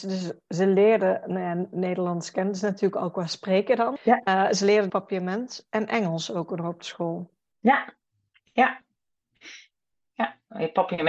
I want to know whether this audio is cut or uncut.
cut